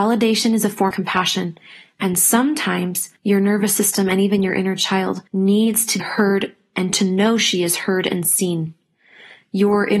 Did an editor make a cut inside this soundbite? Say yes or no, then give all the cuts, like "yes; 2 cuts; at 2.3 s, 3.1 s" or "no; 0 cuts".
yes; 4 cuts; at 0.9 s, 3.2 s, 5.3 s, 6.0 s